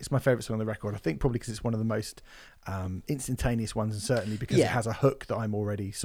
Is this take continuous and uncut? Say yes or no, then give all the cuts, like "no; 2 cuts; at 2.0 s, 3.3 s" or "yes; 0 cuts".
yes; 0 cuts